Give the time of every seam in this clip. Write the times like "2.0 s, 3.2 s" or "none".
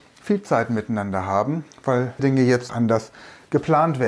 2.2 s, 2.7 s